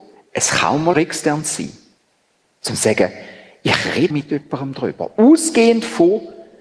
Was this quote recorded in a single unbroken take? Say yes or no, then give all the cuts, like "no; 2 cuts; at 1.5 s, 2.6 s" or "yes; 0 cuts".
no; 2 cuts; at 0.9 s, 4.1 s